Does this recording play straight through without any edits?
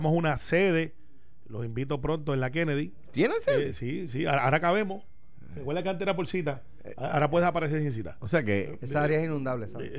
yes; 0 cuts

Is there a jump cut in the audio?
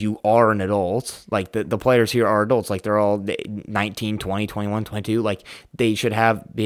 no; 0 cuts

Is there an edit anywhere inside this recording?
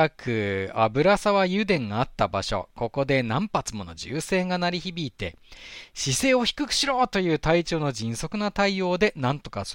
no; 0 cuts

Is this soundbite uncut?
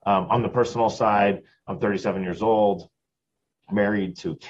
yes; 0 cuts

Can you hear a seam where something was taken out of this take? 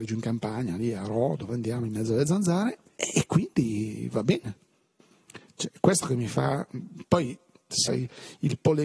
yes; 1 cut; at 7.9 s

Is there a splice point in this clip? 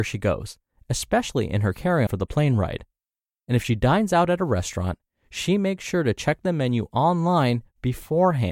yes; 1 cut; at 2.1 s

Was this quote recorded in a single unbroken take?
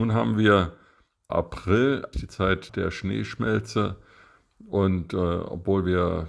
no; 3 cuts; at 1.3 s, 2.1 s, 2.7 s

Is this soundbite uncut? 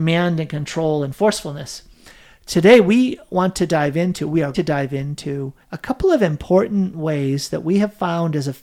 no; 2 cuts; at 4.5 s, 5.6 s

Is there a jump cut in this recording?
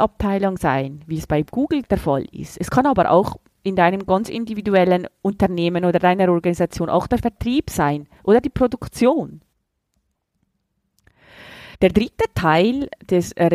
yes; 3 cuts; at 1.3 s, 1.8 s, 11.7 s

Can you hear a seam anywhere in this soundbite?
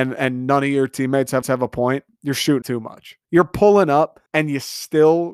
yes; 5 cuts; at 1.4 s, 2.1 s, 2.6 s, 3.2 s, 4.3 s

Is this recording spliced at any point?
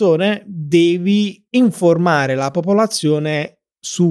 yes; 1 cut; at 1.5 s

